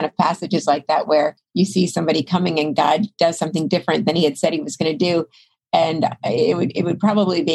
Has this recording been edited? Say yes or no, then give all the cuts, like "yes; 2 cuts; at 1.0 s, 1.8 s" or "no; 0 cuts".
no; 0 cuts